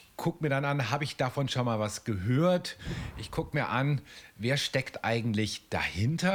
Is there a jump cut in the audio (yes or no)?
no